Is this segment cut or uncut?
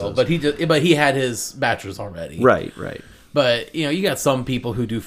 uncut